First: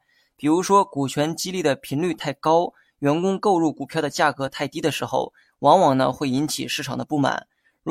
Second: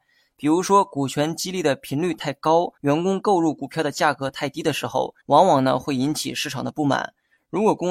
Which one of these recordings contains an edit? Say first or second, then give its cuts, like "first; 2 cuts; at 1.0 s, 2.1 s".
second; 2 cuts; at 2.8 s, 5.2 s